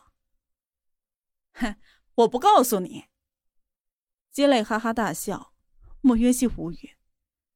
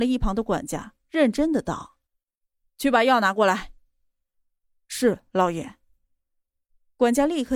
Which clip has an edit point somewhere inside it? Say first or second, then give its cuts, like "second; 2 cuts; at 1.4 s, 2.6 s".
second; 1 cut; at 2.1 s